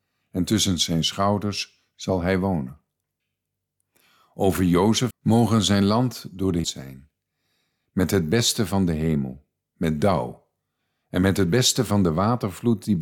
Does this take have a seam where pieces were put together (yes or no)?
yes